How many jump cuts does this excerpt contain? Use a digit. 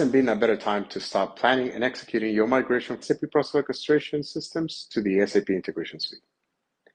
1